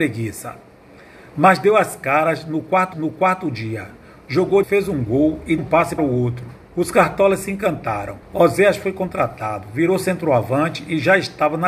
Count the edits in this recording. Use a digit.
6